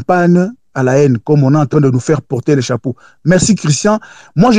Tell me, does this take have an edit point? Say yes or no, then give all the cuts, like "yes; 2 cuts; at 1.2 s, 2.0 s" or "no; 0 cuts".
no; 0 cuts